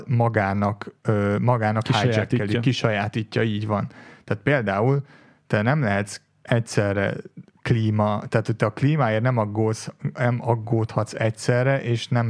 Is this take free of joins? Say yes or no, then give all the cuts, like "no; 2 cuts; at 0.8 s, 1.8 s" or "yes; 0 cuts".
yes; 0 cuts